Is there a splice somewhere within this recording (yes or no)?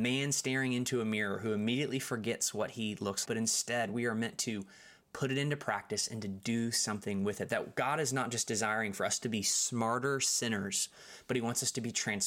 yes